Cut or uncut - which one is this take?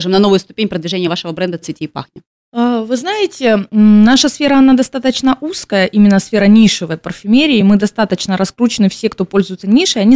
uncut